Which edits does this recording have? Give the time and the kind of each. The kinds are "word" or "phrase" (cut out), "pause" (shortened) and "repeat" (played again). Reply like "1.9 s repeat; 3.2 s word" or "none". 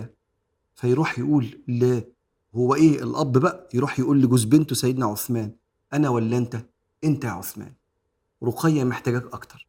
none